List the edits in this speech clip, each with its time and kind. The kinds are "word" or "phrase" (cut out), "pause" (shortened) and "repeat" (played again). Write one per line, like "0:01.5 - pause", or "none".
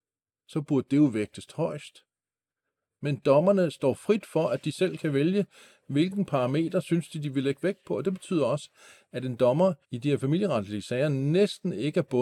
0:09.8 - pause